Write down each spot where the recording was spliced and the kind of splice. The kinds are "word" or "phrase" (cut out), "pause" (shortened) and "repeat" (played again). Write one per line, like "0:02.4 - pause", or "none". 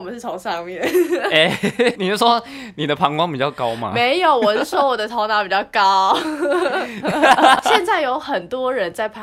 0:02.0 - word